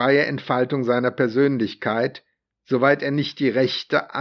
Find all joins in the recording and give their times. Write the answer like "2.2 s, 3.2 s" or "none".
none

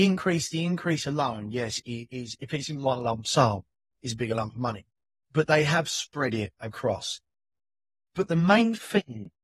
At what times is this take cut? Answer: 6.6 s

